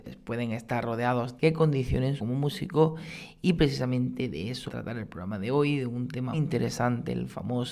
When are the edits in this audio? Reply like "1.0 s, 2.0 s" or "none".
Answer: 1.4 s, 2.2 s, 4.7 s, 6.3 s